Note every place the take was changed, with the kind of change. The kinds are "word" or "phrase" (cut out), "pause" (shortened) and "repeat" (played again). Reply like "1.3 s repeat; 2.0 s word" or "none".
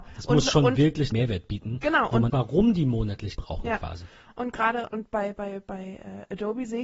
1.1 s word; 2.3 s phrase; 3.4 s word; 4.9 s word